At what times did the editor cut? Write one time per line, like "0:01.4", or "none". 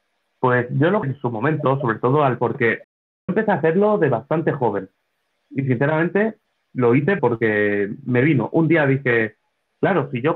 0:01.0
0:02.4
0:03.3
0:07.2